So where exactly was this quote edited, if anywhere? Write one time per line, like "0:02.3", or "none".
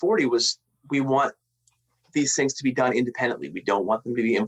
none